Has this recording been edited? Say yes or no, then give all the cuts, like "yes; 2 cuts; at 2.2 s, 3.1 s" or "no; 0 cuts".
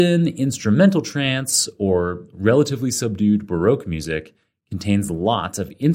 no; 0 cuts